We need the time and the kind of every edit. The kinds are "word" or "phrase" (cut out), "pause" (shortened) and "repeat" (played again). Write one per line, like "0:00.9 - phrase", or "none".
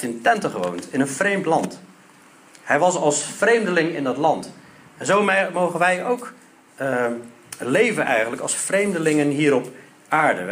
none